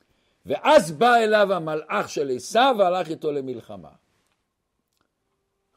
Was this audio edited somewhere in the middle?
no; 0 cuts

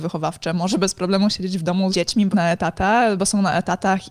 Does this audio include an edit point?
yes; 2 cuts; at 1.9 s, 2.3 s

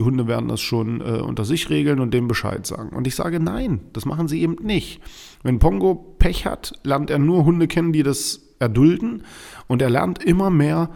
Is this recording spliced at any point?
no; 0 cuts

